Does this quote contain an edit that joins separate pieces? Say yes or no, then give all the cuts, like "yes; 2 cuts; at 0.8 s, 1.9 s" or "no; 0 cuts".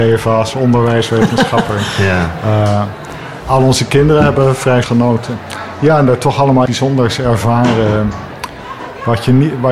yes; 3 cuts; at 3.4 s, 4.8 s, 6.7 s